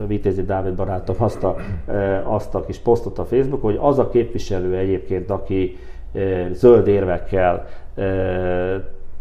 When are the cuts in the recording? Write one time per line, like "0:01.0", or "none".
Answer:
none